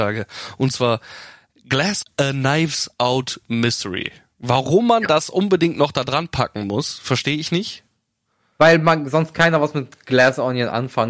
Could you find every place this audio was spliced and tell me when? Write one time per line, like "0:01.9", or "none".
0:02.0